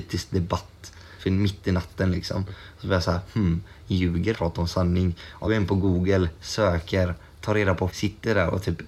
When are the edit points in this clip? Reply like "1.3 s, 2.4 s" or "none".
1.2 s, 4.3 s, 5.5 s, 7.9 s